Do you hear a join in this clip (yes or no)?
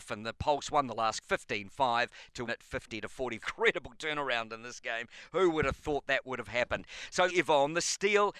yes